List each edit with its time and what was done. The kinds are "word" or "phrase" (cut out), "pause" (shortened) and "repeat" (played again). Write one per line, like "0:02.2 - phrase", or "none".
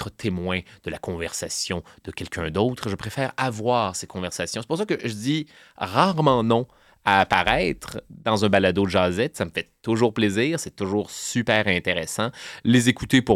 none